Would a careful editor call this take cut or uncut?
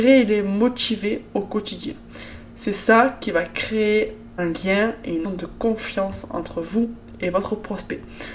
cut